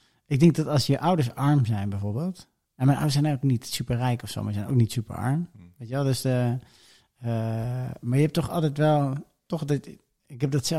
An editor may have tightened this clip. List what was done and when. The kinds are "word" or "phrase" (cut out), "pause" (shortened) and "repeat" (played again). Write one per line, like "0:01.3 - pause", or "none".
none